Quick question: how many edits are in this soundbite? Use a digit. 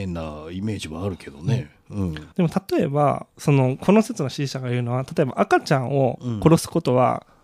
1